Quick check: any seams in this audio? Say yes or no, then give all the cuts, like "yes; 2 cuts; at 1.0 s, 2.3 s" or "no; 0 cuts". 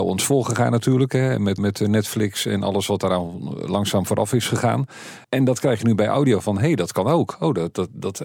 yes; 2 cuts; at 1.6 s, 5.2 s